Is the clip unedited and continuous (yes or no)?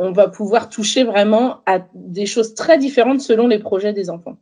yes